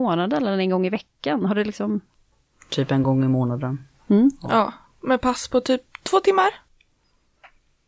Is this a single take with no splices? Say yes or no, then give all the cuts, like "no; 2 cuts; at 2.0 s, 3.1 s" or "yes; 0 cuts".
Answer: yes; 0 cuts